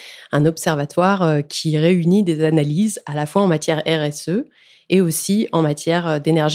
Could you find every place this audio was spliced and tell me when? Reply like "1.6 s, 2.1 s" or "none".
none